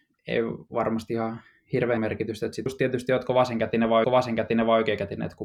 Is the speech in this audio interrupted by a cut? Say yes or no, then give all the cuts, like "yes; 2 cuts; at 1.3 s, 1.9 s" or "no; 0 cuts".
yes; 3 cuts; at 2.0 s, 2.7 s, 4.0 s